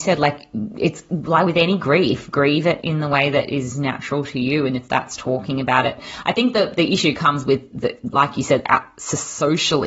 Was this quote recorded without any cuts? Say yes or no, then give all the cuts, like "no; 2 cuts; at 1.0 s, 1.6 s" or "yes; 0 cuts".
yes; 0 cuts